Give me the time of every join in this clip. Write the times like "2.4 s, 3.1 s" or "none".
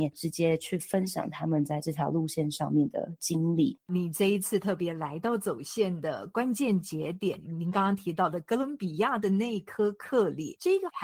3.8 s

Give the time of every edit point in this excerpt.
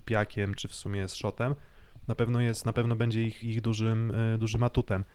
3.4 s

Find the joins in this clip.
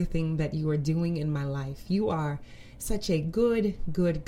none

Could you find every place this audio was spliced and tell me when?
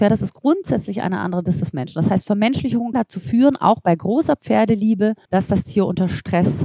2.9 s, 5.2 s

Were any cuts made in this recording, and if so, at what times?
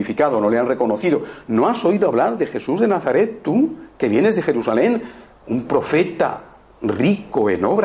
none

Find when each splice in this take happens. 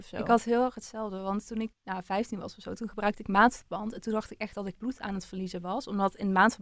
1.7 s, 4.7 s

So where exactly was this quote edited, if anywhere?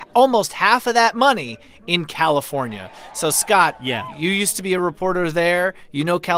none

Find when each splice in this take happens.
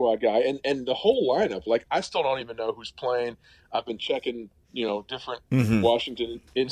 none

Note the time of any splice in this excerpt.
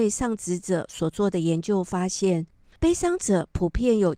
none

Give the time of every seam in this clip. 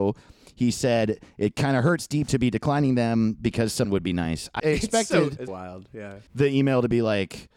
2.3 s, 3.8 s, 4.6 s, 5.5 s, 6.3 s

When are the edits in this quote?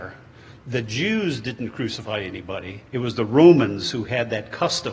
2.9 s

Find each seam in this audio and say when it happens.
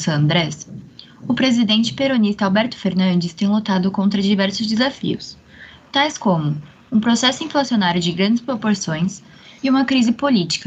none

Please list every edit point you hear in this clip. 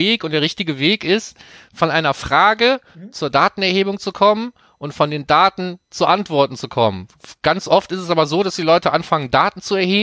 none

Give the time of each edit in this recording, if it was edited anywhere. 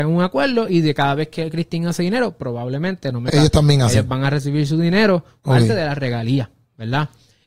3.3 s

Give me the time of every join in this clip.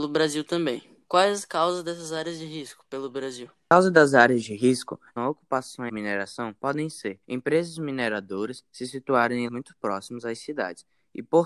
1.0 s, 5.2 s, 5.9 s, 6.6 s, 7.2 s, 9.5 s

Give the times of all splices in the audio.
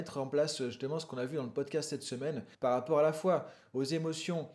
2.5 s

